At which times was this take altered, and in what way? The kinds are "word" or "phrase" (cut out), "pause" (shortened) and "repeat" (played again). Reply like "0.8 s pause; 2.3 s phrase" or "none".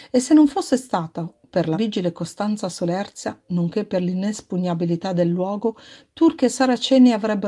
1.7 s word